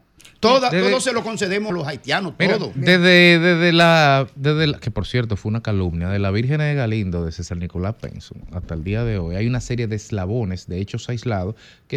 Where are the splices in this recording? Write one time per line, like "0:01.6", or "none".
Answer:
0:01.7